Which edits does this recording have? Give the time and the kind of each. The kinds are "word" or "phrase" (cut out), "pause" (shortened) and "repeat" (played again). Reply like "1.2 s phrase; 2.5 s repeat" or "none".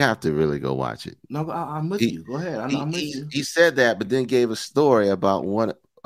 none